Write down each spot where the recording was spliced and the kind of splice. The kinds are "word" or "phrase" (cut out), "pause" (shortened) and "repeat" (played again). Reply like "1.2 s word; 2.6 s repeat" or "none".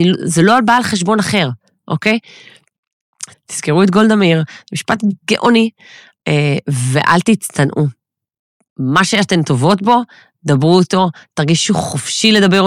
3.3 s phrase